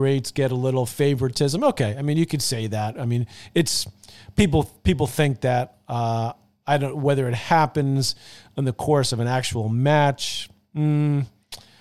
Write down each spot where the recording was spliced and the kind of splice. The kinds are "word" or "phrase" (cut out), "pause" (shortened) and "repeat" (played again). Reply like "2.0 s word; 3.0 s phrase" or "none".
none